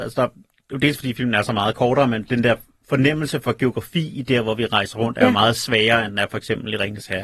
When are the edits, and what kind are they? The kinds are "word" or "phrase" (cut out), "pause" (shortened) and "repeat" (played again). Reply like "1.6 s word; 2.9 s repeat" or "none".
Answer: none

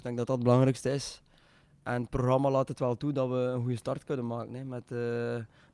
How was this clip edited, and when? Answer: none

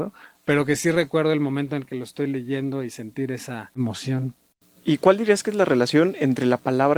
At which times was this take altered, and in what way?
none

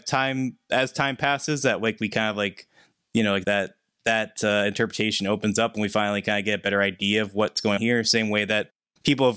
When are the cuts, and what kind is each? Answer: 3.4 s word; 7.8 s word

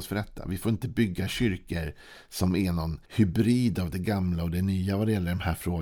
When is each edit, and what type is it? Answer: 3.0 s pause

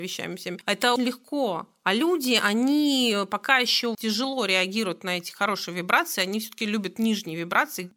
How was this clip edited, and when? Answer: 1.0 s word; 3.9 s word

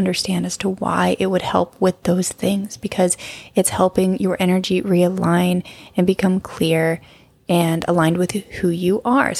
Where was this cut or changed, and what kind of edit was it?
none

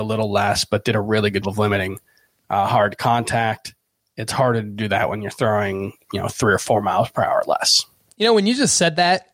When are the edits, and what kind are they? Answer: 1.4 s word

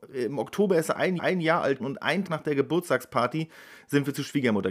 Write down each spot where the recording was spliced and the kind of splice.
1.2 s repeat; 1.8 s word; 2.3 s word

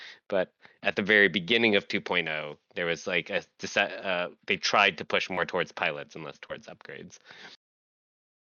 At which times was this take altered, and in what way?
none

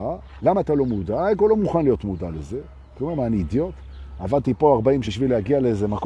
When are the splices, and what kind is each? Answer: 5.0 s word

